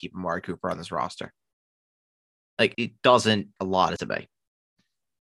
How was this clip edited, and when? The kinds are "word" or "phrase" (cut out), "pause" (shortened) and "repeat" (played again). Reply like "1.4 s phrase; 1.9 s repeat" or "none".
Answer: 2.7 s word; 3.6 s word; 4.0 s word